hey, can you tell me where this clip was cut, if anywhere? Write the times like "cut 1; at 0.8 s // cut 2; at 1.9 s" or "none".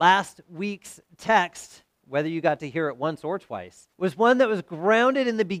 cut 1; at 3.9 s